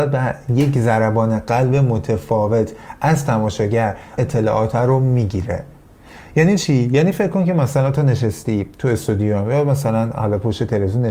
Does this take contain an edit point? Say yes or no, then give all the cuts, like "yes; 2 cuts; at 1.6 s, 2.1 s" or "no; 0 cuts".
yes; 1 cut; at 4.2 s